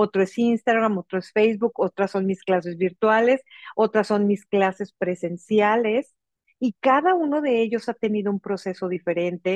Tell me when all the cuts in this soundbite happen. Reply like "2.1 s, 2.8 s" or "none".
none